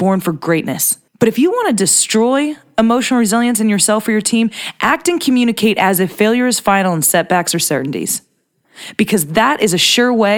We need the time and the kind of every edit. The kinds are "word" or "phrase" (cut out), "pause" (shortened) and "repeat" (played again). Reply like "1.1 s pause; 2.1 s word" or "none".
1.1 s pause